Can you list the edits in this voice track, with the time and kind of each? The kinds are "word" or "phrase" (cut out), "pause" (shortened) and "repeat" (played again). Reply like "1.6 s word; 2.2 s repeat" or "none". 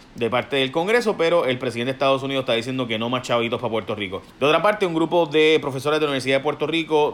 4.3 s pause